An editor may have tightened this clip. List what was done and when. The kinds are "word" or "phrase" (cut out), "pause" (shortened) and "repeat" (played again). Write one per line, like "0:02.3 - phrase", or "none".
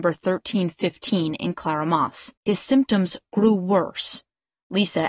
0:02.4 - pause

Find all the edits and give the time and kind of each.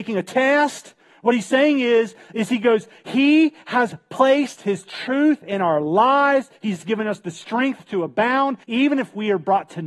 0:08.6 - pause

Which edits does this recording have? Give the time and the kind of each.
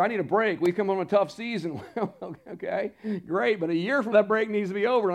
0:04.1 - word

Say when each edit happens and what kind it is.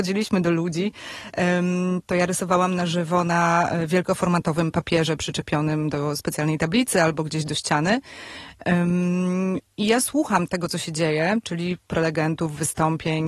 0:11.9 - word

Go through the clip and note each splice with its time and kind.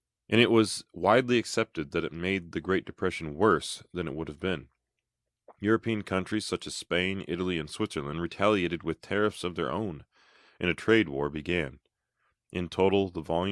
none

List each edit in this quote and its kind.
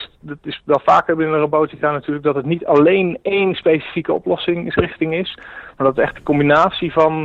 none

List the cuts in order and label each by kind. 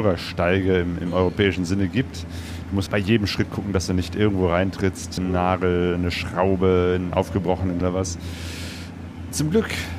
0:02.9 - word
0:05.2 - word
0:07.1 - word
0:07.8 - word

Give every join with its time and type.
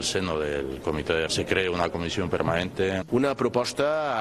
0:01.3 - word

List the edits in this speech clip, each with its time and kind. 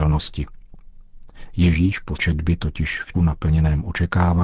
0:02.2 - word
0:03.1 - word

